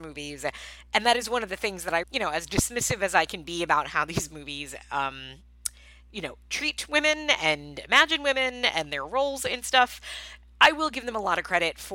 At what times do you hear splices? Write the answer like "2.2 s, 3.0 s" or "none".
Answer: 2.0 s